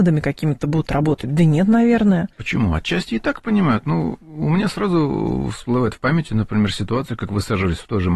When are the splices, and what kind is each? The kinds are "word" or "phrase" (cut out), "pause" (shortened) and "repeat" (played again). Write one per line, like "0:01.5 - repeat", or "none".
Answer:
0:02.3 - pause